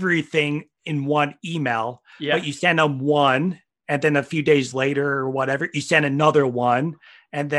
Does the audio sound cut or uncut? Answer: uncut